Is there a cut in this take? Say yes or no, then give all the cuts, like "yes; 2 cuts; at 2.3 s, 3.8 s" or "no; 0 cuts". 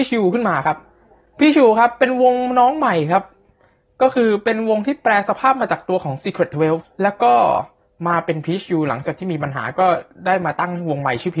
yes; 1 cut; at 6.8 s